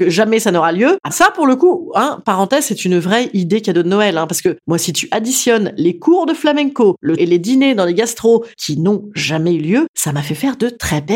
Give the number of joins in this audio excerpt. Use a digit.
2